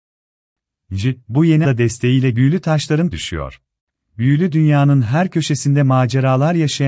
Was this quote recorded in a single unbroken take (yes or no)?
no